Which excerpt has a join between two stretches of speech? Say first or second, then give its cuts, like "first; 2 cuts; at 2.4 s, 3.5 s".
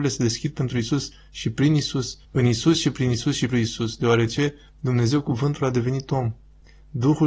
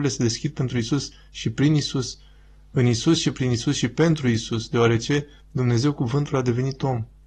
first; 2 cuts; at 2.2 s, 3.5 s